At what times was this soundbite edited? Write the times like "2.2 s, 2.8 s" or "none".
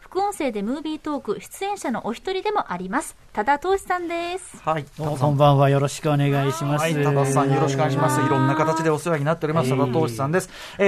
4.9 s